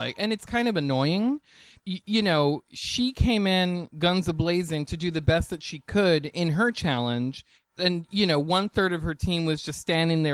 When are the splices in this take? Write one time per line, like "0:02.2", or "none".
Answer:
0:01.8
0:07.6